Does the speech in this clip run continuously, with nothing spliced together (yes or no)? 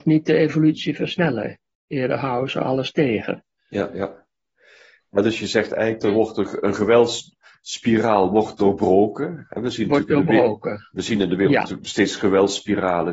yes